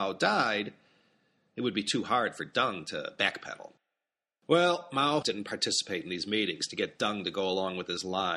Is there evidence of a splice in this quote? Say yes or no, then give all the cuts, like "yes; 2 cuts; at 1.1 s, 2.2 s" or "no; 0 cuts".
yes; 1 cut; at 5.2 s